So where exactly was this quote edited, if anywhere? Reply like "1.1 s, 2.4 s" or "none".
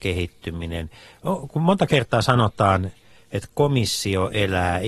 none